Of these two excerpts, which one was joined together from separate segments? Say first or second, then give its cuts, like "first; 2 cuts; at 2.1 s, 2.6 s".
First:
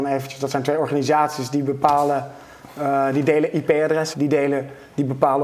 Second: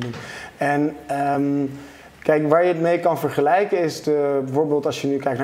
first; 1 cut; at 4.1 s